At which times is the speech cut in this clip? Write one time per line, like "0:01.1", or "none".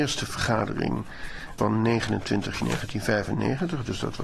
0:01.6
0:02.6